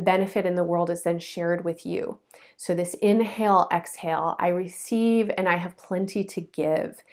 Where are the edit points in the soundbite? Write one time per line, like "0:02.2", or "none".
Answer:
none